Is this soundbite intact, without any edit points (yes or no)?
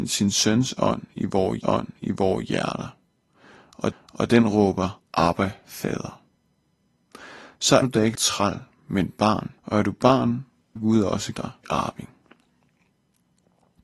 no